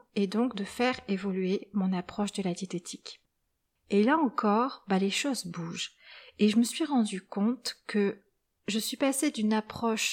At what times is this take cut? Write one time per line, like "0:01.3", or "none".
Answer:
none